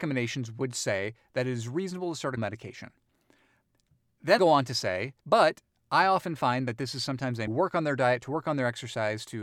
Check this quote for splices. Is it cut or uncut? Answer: cut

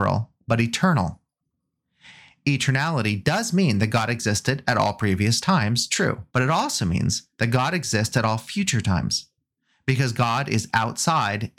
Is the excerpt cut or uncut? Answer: cut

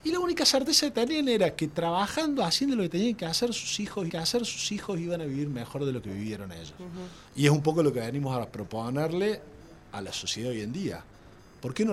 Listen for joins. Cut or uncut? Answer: cut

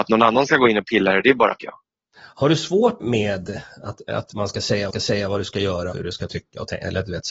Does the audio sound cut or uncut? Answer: cut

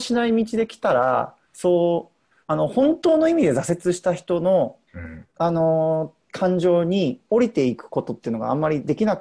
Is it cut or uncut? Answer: cut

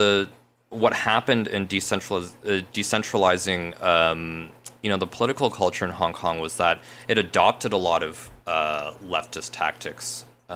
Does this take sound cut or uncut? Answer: uncut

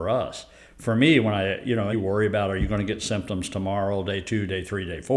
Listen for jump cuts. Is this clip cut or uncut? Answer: cut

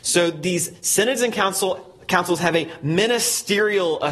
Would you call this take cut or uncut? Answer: uncut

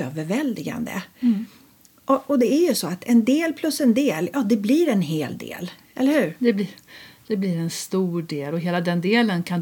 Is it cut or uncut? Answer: uncut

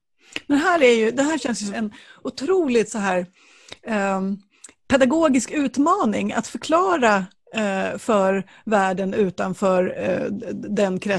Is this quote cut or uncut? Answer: cut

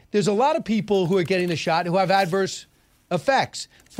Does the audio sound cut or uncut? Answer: uncut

